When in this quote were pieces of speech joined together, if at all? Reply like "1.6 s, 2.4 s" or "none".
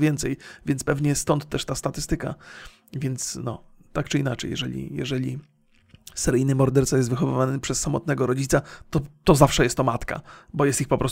none